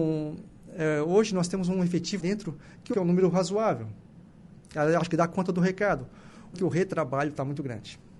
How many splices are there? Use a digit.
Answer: 3